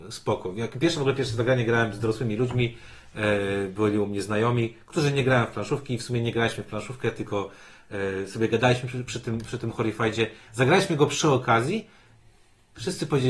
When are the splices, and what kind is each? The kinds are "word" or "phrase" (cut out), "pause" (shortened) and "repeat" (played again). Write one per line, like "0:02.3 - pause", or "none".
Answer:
none